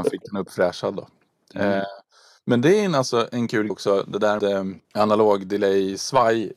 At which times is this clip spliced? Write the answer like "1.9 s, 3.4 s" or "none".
3.7 s, 4.4 s, 4.8 s